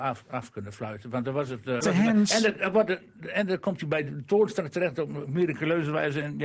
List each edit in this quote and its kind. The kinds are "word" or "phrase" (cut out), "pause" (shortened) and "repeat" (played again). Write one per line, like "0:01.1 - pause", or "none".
0:01.8 - phrase